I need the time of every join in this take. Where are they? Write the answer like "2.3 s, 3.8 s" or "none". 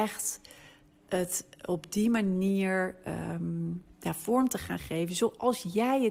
none

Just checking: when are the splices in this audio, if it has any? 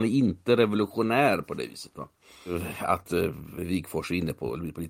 none

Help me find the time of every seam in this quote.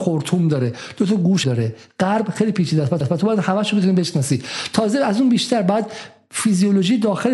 1.4 s, 3.0 s

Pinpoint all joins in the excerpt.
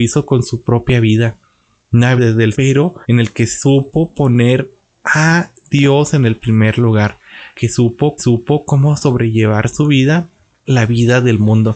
2.2 s, 2.5 s, 3.0 s, 7.5 s, 8.2 s, 10.7 s

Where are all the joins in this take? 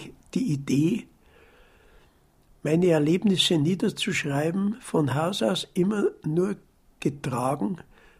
none

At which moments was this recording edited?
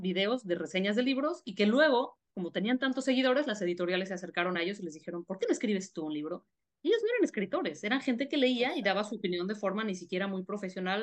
none

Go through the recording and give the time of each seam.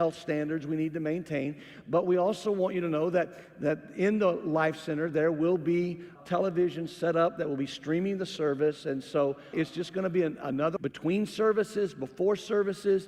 6.2 s, 9.5 s, 10.8 s

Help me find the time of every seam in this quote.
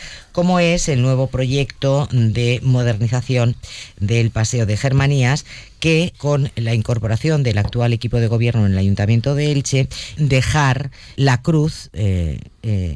6.1 s, 10.2 s, 11.2 s

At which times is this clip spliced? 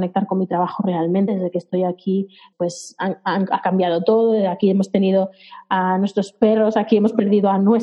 1.3 s, 2.5 s

